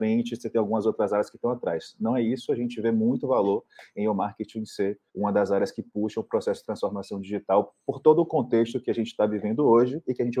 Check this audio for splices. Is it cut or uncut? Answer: cut